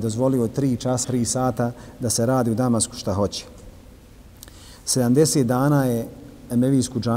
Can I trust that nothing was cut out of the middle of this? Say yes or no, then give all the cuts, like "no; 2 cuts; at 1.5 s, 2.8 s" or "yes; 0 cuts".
no; 1 cut; at 1.0 s